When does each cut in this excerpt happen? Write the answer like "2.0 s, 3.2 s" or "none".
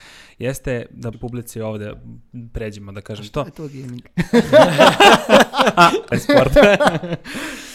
1.1 s, 6.1 s